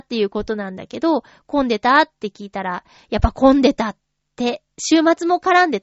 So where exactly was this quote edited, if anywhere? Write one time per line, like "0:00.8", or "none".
none